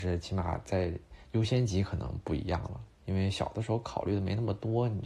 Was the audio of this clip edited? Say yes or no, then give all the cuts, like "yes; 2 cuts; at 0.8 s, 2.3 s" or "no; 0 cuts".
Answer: yes; 2 cuts; at 1.2 s, 2.9 s